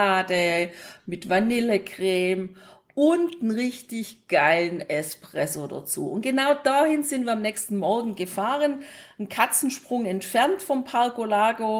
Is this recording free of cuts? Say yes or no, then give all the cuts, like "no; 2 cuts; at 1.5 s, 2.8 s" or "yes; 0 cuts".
yes; 0 cuts